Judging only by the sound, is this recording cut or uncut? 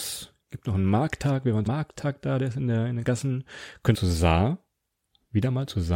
cut